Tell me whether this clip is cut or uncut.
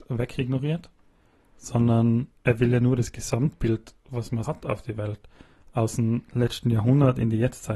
cut